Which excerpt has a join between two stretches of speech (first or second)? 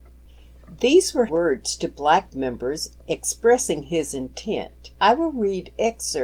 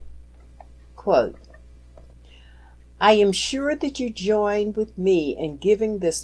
first